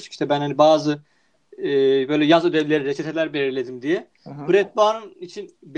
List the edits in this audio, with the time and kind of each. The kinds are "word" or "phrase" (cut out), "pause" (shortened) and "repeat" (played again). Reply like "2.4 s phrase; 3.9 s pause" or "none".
none